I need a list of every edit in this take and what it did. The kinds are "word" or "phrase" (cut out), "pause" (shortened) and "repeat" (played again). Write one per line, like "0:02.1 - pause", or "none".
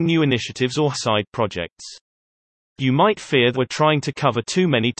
0:00.9 - word
0:03.5 - word